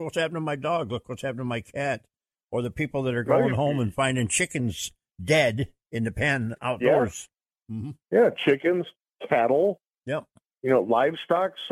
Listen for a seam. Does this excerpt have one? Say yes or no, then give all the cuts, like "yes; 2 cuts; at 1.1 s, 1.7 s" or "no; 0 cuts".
no; 0 cuts